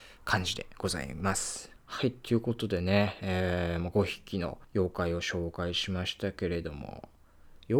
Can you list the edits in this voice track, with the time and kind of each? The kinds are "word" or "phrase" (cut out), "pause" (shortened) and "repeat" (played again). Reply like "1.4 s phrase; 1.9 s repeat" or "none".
1.8 s pause; 4.6 s pause